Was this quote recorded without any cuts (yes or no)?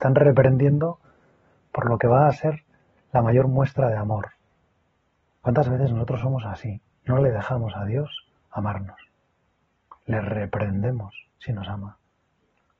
yes